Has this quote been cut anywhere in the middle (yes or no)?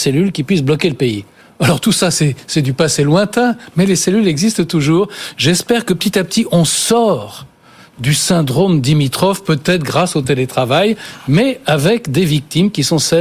no